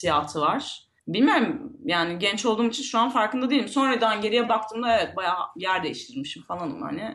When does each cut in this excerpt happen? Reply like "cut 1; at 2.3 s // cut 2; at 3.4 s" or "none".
cut 1; at 1.0 s